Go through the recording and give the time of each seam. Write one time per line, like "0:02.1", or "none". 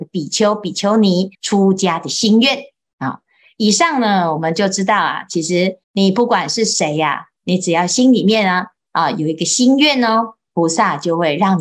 0:01.3
0:05.8

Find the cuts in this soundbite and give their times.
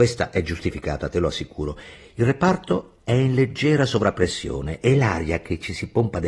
none

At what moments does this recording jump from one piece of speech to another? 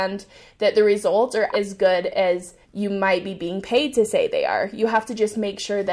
0:01.5
0:02.6

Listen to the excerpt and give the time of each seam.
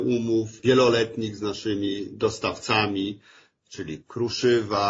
none

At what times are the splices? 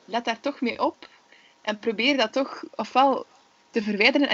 none

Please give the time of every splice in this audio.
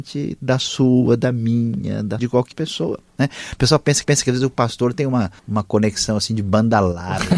0:02.2
0:02.5
0:04.0
0:05.4

